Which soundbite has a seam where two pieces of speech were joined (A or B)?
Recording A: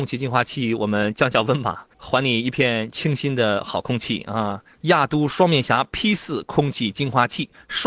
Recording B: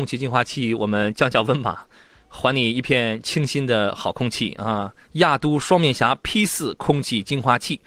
A